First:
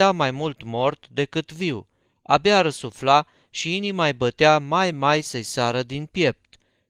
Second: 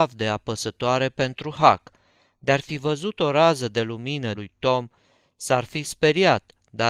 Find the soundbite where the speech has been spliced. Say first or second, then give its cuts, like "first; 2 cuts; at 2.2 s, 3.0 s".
second; 1 cut; at 4.3 s